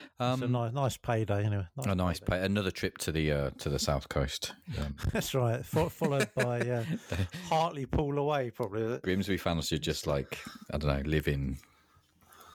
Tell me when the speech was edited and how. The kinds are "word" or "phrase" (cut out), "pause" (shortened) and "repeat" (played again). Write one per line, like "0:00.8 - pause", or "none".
none